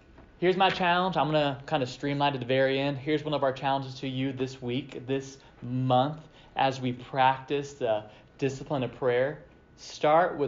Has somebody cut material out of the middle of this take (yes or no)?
no